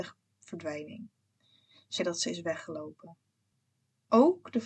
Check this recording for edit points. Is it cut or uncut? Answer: cut